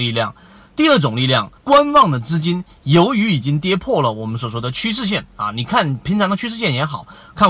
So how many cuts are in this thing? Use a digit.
1